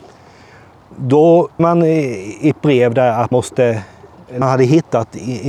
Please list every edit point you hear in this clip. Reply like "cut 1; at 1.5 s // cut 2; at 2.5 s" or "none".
cut 1; at 1.6 s // cut 2; at 3.3 s // cut 3; at 4.4 s